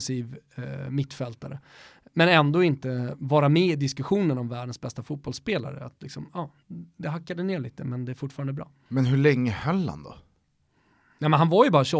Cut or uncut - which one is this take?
uncut